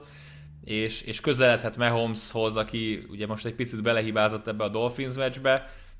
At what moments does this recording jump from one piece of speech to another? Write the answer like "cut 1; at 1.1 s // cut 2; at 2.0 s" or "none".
none